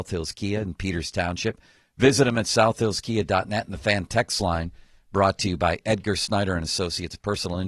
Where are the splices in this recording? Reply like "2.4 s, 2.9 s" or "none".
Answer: none